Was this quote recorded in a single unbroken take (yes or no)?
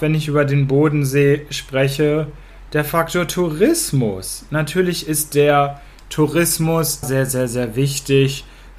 no